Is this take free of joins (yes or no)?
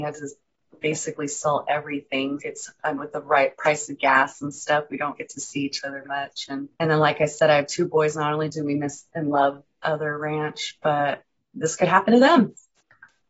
no